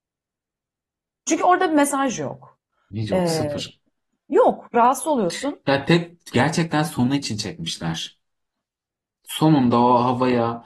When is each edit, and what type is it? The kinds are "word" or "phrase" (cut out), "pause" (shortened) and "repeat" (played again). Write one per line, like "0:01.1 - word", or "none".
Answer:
none